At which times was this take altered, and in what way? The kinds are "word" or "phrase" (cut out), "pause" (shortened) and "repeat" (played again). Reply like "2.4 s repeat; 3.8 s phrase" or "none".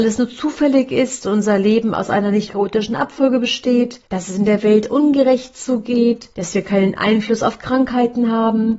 2.5 s word; 4.0 s pause; 6.3 s pause